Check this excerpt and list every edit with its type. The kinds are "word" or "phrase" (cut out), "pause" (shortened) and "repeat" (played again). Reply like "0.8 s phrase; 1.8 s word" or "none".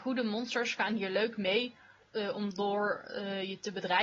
none